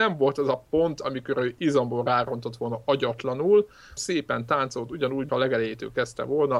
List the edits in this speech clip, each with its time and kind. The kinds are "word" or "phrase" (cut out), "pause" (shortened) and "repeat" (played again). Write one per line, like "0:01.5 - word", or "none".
0:04.0 - word
0:05.3 - word